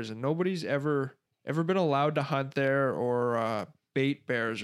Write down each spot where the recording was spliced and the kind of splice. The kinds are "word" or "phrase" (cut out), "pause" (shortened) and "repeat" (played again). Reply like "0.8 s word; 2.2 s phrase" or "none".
1.3 s pause